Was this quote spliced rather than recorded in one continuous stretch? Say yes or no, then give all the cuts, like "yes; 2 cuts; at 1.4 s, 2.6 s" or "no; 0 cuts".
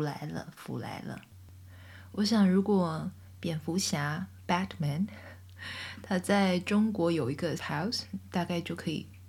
yes; 1 cut; at 7.6 s